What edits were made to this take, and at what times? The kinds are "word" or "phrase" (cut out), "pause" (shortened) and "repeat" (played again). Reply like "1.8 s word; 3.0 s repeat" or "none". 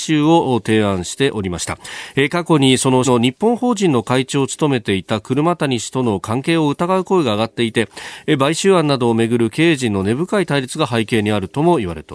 3.0 s word